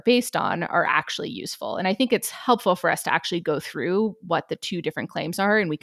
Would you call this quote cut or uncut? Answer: uncut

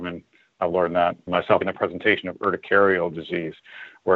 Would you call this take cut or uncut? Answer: cut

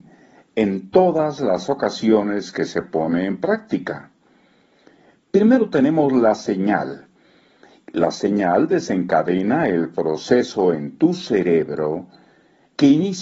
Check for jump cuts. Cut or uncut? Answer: uncut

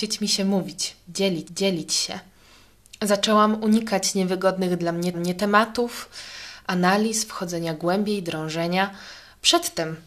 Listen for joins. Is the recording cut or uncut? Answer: cut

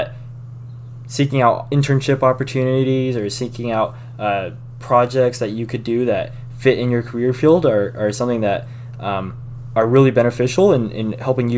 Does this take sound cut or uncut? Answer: uncut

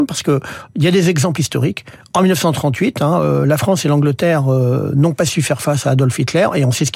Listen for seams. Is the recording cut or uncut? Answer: uncut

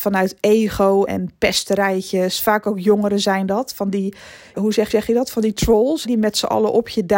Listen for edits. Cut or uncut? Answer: cut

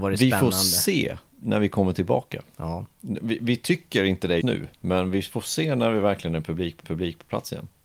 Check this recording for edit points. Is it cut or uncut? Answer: cut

